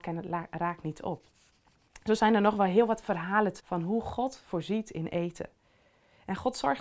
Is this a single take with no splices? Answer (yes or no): no